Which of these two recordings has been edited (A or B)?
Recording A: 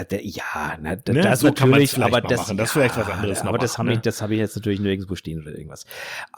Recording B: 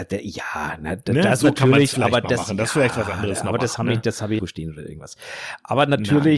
B